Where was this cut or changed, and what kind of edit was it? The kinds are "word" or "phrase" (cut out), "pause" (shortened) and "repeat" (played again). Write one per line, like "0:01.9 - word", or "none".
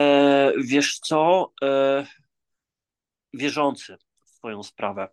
none